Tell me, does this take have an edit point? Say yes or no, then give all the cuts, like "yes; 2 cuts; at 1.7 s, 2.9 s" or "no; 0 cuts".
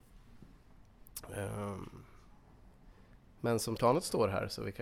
yes; 1 cut; at 3.8 s